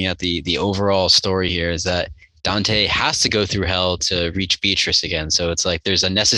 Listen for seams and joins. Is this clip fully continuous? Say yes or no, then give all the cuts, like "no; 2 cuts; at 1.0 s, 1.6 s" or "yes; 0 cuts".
yes; 0 cuts